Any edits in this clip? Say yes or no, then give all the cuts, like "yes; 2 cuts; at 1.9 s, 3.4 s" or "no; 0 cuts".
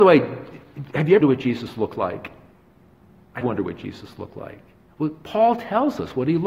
yes; 2 cuts; at 1.2 s, 3.4 s